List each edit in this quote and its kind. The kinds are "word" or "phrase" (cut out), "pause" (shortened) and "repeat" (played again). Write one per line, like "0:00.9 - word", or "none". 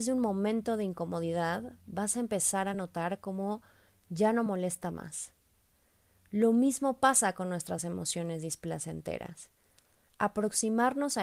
none

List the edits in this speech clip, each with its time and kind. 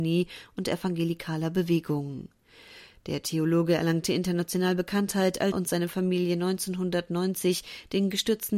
0:05.5 - word

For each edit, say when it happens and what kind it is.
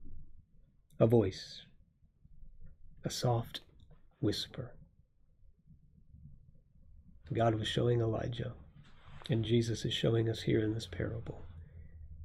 none

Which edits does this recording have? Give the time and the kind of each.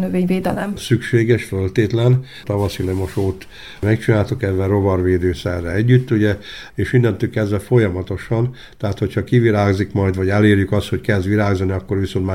none

